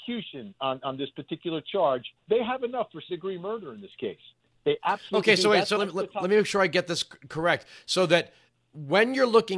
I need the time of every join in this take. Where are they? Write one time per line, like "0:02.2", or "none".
0:02.2
0:03.1
0:05.8

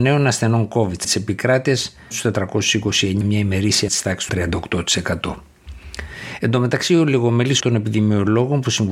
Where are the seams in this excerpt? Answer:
0:01.0
0:02.1
0:03.2
0:03.9
0:04.3
0:07.6

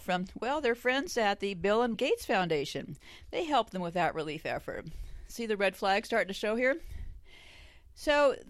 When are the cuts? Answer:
0:01.9

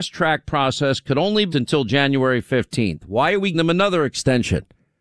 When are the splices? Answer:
0:01.5
0:03.5

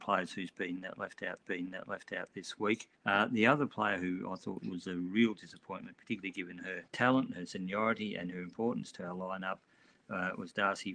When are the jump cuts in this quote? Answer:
0:01.4
0:03.0
0:06.9

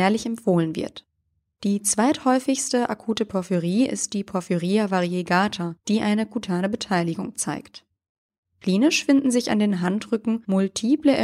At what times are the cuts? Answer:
0:05.8

